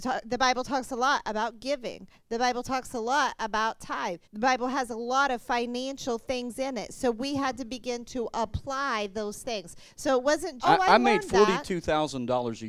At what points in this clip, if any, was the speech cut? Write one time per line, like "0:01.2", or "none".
0:04.2
0:10.6